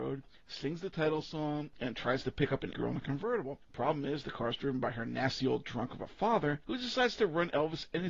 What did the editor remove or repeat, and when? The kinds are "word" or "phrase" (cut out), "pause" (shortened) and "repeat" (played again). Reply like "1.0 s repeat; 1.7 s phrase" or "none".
2.7 s word